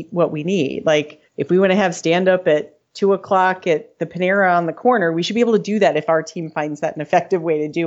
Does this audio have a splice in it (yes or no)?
yes